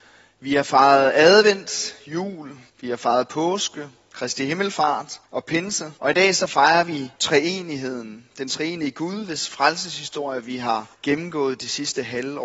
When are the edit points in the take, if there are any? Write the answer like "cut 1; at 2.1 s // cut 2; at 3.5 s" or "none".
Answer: cut 1; at 2.7 s // cut 2; at 5.3 s // cut 3; at 6.0 s // cut 4; at 7.1 s // cut 5; at 10.9 s